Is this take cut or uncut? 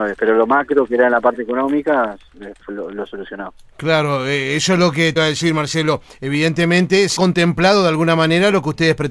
cut